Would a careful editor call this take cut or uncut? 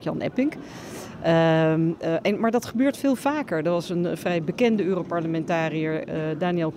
uncut